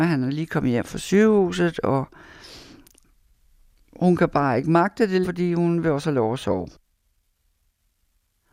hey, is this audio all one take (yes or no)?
no